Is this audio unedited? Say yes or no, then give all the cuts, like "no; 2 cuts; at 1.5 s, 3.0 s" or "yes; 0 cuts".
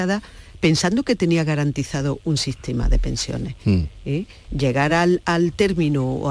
yes; 0 cuts